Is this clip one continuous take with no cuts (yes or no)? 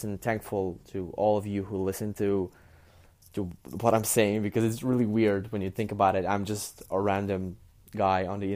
yes